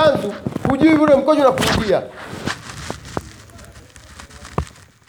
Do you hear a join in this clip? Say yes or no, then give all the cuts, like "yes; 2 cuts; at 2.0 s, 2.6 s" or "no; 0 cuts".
no; 0 cuts